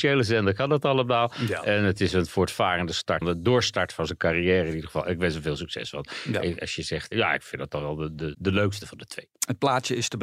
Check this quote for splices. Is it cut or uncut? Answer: cut